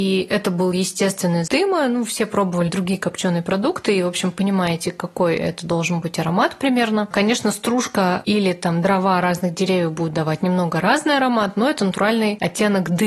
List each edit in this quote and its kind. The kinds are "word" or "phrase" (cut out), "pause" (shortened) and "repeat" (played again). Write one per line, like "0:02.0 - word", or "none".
0:01.5 - word
0:02.7 - word